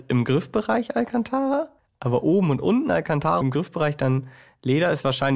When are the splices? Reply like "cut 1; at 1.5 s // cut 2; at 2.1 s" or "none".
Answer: cut 1; at 1.8 s // cut 2; at 3.4 s